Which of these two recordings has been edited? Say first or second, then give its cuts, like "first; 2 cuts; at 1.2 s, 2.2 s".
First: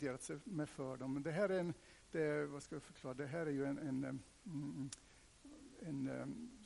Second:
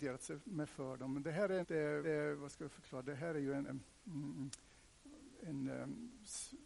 second; 3 cuts; at 1.6 s, 2.0 s, 3.7 s